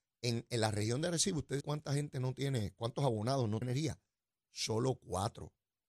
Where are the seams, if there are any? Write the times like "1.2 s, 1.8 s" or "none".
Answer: 1.6 s, 3.6 s